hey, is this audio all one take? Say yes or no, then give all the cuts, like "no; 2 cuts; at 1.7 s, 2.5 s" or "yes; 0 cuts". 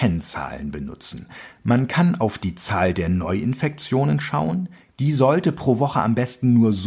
yes; 0 cuts